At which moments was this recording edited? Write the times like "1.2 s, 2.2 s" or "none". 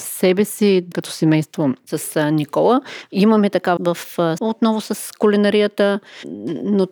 0.9 s, 3.8 s, 4.4 s